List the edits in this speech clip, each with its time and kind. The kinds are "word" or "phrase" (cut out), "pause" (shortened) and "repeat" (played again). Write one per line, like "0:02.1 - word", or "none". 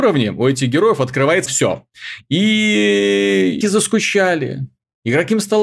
0:01.5 - word
0:03.6 - word

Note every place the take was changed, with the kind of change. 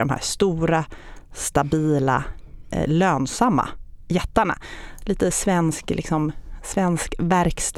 none

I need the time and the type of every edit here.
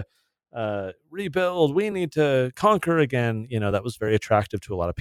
none

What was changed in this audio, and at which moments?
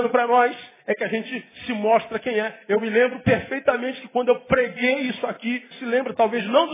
0:05.7 - word

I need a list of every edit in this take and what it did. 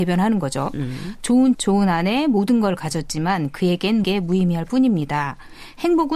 0:01.5 - word
0:04.0 - word

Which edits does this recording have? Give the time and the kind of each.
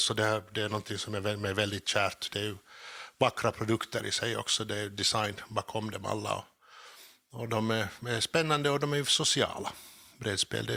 none

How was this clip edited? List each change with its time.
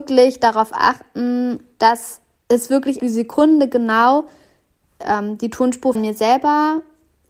0:02.4 - pause
0:03.0 - word
0:05.0 - phrase
0:06.0 - word

